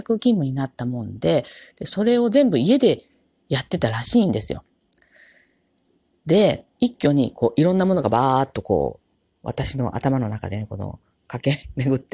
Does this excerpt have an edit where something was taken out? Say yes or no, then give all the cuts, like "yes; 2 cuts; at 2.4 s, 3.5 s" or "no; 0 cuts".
yes; 1 cut; at 6.7 s